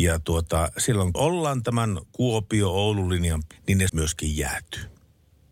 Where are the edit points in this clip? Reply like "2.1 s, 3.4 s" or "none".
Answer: 1.1 s, 3.5 s, 3.9 s